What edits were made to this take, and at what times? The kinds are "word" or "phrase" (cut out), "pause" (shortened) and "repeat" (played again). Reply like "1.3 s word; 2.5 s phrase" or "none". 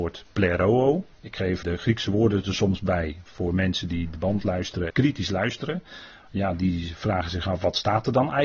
1.1 s pause; 1.6 s word; 4.9 s word